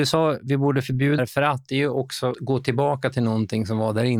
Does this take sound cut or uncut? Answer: cut